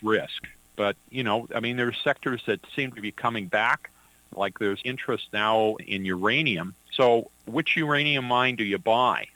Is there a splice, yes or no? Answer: yes